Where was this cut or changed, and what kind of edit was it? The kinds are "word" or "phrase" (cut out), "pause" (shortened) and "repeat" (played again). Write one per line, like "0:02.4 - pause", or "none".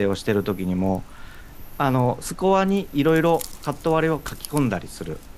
none